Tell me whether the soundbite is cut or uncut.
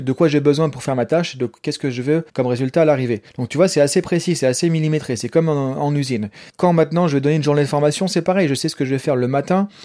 cut